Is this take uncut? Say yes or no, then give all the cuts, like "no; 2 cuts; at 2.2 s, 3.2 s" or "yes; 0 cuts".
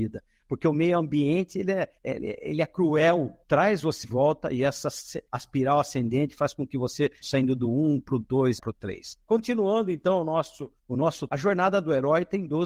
no; 9 cuts; at 2.0 s, 3.4 s, 4.0 s, 5.3 s, 7.2 s, 8.6 s, 9.2 s, 10.8 s, 11.3 s